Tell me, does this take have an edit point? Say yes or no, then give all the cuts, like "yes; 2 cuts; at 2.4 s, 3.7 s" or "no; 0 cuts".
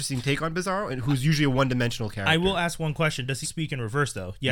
yes; 1 cut; at 3.4 s